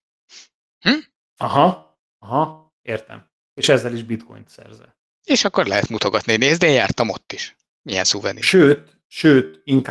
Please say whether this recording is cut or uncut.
uncut